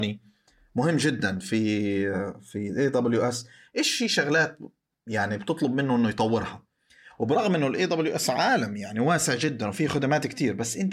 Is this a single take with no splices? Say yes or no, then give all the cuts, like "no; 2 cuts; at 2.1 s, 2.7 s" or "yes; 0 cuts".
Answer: yes; 0 cuts